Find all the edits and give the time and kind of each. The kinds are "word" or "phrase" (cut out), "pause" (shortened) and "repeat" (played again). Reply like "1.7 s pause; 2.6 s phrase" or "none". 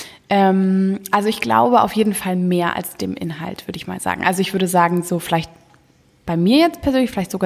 none